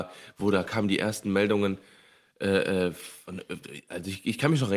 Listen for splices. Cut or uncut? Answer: uncut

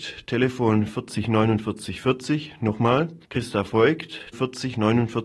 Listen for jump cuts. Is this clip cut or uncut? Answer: cut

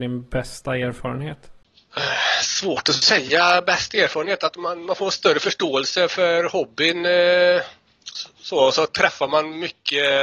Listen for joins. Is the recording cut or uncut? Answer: uncut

